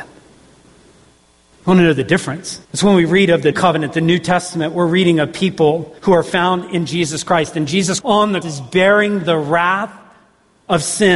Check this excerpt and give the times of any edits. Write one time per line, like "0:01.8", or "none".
0:02.6
0:03.5
0:06.0
0:08.0
0:08.4